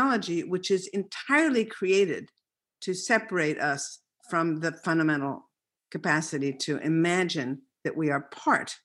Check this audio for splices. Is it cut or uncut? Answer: uncut